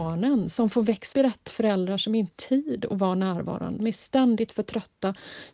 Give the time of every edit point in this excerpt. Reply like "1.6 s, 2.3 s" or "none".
1.1 s, 1.5 s, 2.3 s, 3.8 s